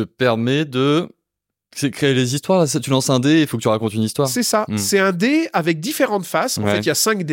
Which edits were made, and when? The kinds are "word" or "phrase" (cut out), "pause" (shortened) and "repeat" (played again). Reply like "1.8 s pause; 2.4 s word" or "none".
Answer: none